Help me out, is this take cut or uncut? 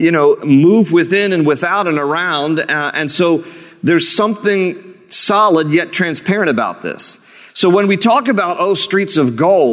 uncut